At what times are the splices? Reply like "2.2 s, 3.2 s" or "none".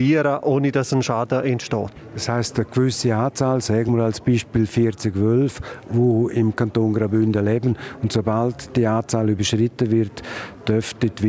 none